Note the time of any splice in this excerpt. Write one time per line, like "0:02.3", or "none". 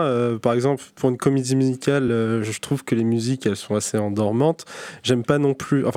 none